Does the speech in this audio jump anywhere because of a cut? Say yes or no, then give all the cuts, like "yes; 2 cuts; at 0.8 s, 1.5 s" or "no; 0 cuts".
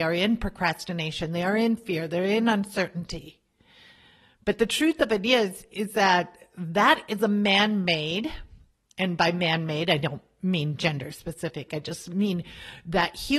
no; 0 cuts